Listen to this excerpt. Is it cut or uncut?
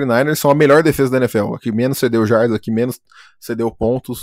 uncut